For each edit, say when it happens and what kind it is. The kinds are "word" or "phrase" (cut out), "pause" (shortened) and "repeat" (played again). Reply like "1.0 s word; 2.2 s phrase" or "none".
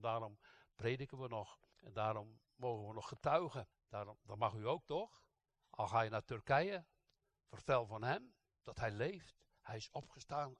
1.7 s pause; 3.7 s pause; 5.5 s pause